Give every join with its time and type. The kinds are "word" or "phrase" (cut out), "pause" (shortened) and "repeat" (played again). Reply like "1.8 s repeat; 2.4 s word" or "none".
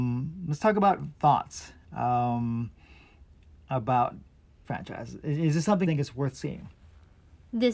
1.1 s word; 4.6 s word; 5.8 s word